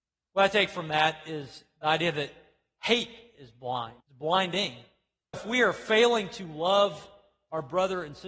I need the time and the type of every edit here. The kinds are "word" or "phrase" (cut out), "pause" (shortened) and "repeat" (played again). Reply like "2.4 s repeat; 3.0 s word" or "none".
4.0 s pause; 5.3 s word